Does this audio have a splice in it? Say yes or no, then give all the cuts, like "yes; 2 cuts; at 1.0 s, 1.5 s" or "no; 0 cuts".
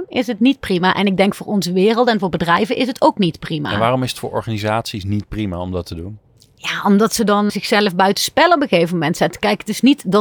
yes; 1 cut; at 7.5 s